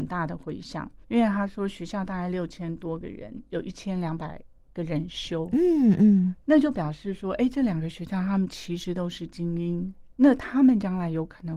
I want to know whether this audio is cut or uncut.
cut